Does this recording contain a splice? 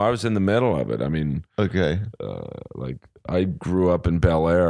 no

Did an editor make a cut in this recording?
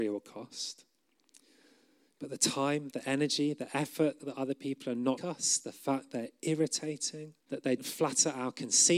yes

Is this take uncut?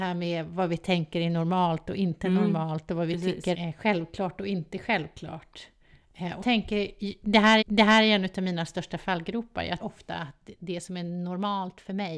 no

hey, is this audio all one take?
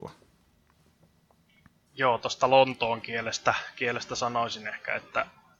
yes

